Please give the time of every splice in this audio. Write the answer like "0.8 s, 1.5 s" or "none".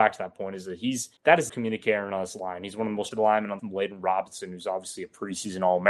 1.2 s, 1.5 s, 3.1 s, 3.6 s